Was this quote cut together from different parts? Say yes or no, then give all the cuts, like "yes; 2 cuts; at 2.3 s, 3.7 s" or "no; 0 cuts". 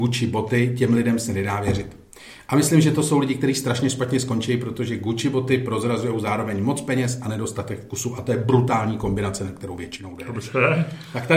no; 0 cuts